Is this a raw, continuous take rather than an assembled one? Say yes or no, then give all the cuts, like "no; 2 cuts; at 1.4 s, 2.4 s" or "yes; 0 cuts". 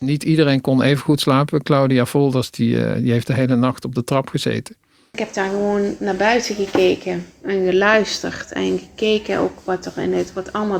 yes; 0 cuts